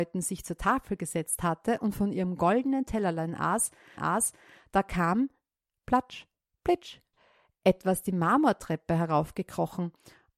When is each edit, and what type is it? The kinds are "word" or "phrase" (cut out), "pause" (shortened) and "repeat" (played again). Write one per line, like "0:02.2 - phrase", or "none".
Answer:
0:04.0 - repeat
0:05.7 - word
0:07.1 - word